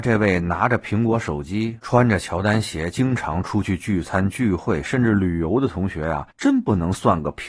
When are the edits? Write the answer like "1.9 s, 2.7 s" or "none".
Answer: 6.3 s